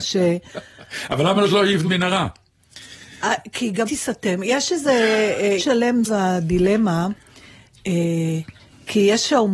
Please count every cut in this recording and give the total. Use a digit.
4